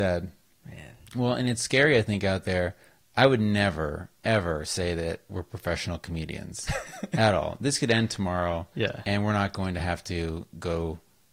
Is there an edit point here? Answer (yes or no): no